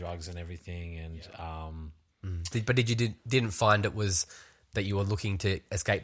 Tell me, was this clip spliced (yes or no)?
no